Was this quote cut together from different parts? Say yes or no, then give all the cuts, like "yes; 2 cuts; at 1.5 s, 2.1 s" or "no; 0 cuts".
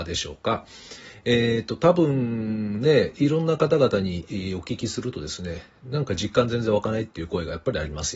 no; 0 cuts